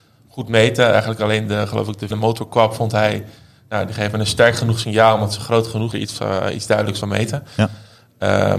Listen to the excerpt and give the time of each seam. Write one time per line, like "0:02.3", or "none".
0:02.1
0:05.9
0:07.0